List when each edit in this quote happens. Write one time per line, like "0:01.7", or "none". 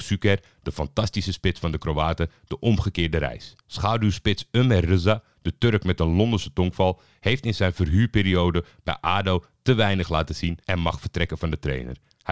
0:03.6
0:10.6

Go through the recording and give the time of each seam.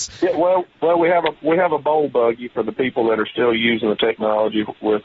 none

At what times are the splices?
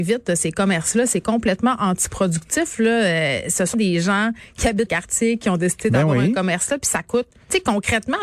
0:03.7
0:04.9

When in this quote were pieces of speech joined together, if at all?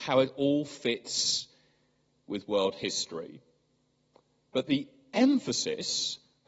none

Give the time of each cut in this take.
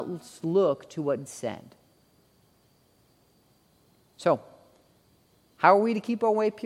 0:01.3

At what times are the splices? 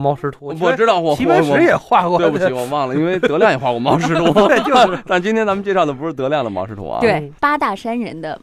none

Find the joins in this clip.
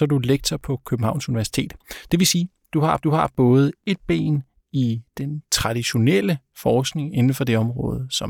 0:03.0

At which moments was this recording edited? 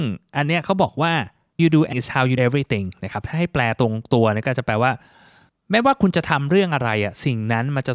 0:01.6
0:01.9
0:02.4

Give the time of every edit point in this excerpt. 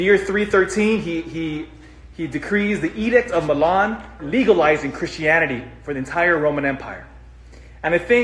0:04.2

